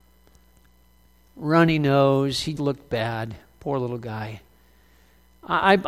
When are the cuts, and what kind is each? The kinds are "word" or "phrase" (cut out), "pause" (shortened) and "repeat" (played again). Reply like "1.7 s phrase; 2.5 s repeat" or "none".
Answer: 2.6 s word